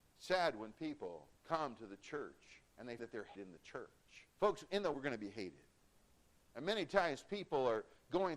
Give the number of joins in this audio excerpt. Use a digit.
6